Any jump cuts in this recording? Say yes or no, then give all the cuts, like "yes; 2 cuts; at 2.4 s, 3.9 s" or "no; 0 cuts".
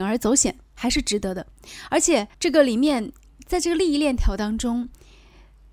yes; 1 cut; at 2.3 s